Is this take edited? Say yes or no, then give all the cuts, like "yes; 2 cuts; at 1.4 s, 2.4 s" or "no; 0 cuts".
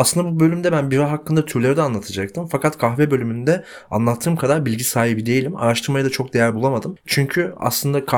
no; 0 cuts